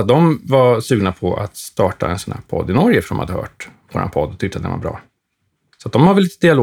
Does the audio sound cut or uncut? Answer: uncut